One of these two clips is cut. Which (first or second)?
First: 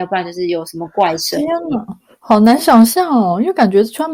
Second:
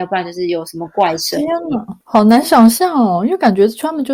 second